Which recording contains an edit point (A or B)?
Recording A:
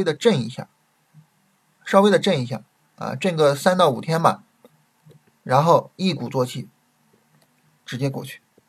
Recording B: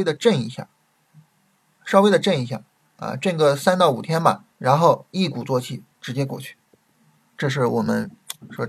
B